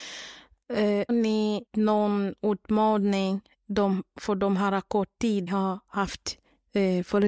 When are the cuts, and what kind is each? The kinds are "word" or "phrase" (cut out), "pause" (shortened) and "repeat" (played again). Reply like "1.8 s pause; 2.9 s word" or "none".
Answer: 1.1 s word; 1.7 s word; 5.5 s phrase